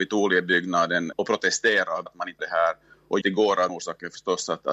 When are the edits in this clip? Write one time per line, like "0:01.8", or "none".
0:01.1
0:02.1
0:02.4
0:03.2
0:03.7